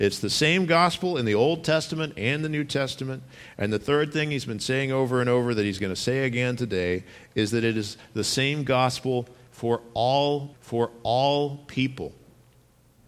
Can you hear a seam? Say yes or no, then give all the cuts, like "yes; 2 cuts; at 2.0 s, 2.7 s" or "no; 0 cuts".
yes; 1 cut; at 10.5 s